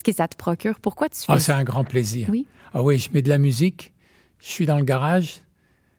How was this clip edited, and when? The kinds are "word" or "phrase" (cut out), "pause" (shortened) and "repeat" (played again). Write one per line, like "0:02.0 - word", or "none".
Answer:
none